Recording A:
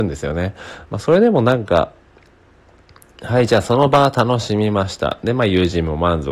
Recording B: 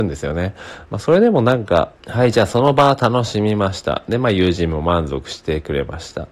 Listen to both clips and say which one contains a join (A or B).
B